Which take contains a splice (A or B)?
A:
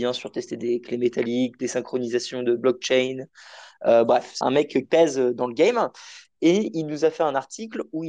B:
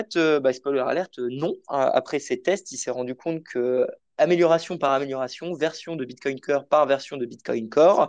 A